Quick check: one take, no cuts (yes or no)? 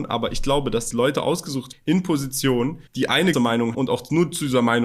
no